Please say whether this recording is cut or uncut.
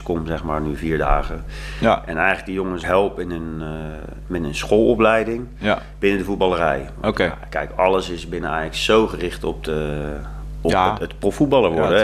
cut